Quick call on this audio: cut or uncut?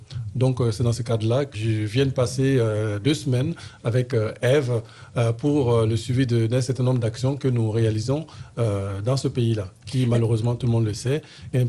cut